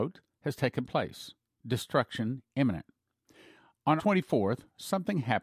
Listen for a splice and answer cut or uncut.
cut